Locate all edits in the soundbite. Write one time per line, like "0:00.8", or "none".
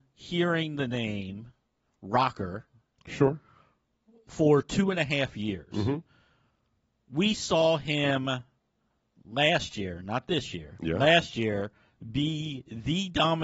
none

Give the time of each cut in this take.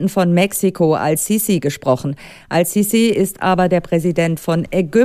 none

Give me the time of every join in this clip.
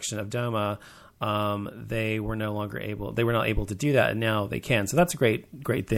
none

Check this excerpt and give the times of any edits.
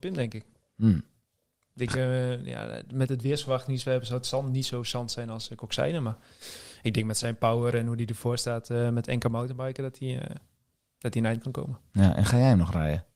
none

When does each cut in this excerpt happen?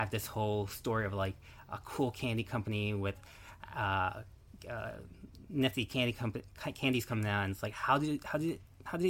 none

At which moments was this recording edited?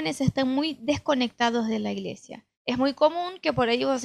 0:02.5

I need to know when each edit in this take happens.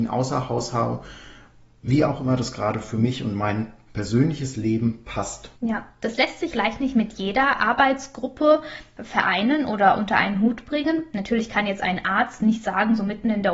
0:05.6
0:06.5

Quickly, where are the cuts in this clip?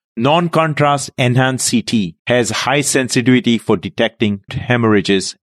0:02.2
0:04.5

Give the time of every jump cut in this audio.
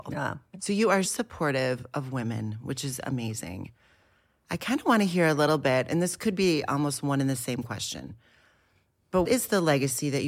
0:01.1
0:09.3

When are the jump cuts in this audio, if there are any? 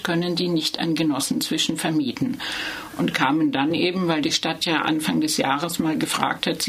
none

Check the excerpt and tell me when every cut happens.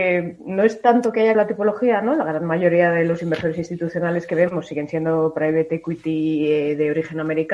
0:01.3

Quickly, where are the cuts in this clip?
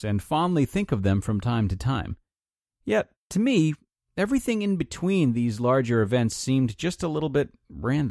none

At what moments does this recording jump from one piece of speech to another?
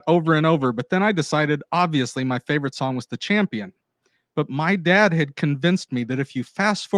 none

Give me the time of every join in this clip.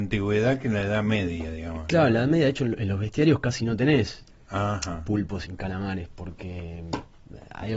0:05.4

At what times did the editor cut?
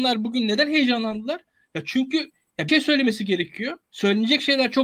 0:02.7
0:03.8

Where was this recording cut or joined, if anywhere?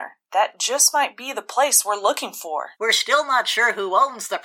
0:02.7

